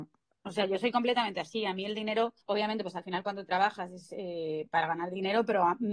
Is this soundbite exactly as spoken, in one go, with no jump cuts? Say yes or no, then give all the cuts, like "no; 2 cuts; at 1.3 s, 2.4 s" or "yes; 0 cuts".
no; 1 cut; at 2.4 s